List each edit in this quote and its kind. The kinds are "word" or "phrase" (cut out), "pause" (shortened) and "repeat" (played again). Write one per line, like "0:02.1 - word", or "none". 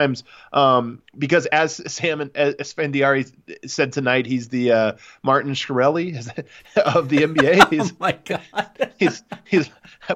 none